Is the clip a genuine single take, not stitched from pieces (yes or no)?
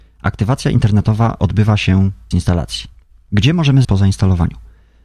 no